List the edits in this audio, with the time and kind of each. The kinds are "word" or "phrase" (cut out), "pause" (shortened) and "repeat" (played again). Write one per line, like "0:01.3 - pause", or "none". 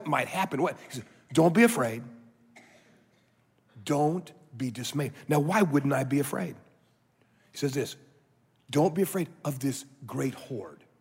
none